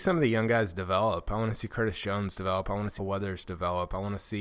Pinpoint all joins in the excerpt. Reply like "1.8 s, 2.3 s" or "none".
3.0 s